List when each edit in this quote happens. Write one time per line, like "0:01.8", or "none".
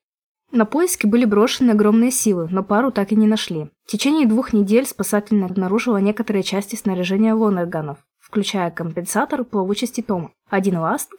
0:03.8
0:05.5